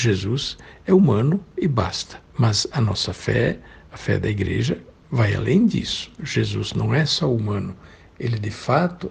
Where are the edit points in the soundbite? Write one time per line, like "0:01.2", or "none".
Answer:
0:02.3